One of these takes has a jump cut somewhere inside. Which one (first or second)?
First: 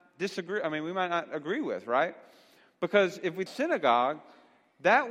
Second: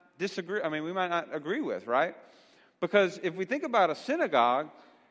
first